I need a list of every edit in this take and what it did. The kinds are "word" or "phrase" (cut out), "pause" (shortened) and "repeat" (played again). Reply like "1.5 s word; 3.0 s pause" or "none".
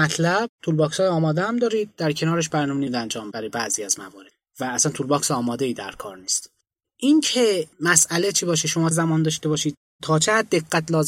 2.9 s phrase; 3.3 s word; 7.7 s pause; 8.9 s word